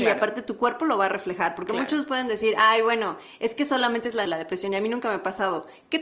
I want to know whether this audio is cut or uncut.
cut